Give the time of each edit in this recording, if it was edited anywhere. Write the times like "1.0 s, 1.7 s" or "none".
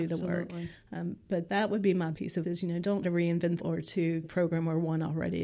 1.5 s, 2.1 s, 2.4 s, 3.0 s, 3.6 s, 4.2 s